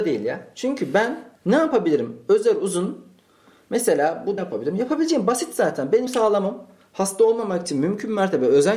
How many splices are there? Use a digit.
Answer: 3